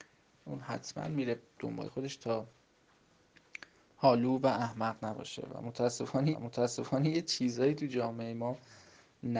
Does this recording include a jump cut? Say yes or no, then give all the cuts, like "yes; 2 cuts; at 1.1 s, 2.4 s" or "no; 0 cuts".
yes; 2 cuts; at 1.9 s, 6.3 s